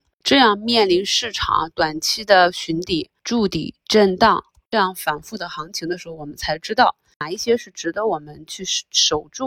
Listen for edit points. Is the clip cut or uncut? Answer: cut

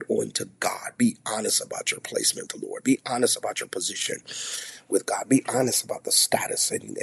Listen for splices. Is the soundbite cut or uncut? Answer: cut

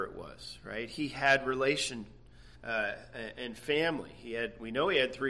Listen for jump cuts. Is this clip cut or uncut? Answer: cut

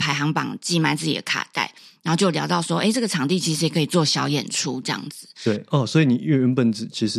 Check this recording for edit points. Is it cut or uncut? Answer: uncut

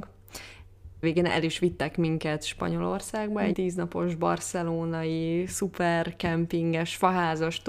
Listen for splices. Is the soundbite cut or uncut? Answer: cut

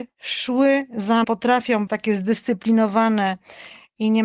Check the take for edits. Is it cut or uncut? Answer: cut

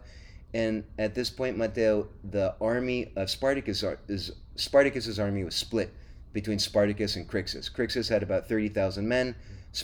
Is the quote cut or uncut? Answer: uncut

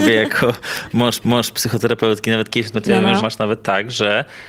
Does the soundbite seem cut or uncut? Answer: cut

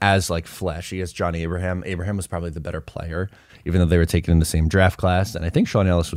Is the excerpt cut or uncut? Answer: uncut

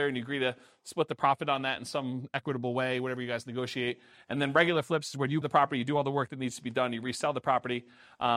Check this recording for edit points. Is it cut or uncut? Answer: cut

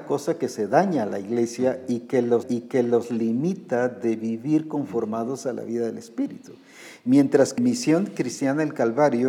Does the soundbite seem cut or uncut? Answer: cut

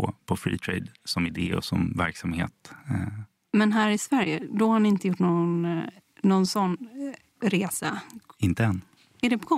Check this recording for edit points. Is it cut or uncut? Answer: uncut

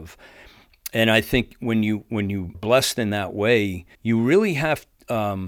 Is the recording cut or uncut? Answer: cut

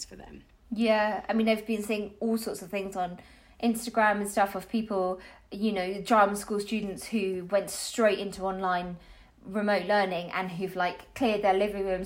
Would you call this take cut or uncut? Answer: uncut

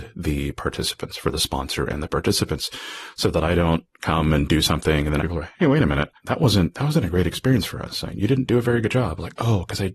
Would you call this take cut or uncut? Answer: cut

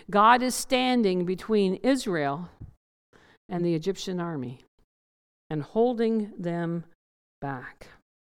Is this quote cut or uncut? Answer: uncut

